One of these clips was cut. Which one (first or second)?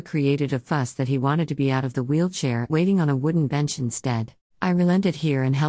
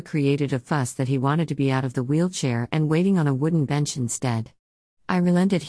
first